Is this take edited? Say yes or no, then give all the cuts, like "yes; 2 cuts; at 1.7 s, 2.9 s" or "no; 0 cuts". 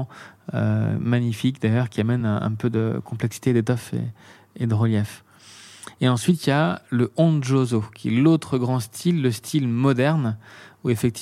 no; 0 cuts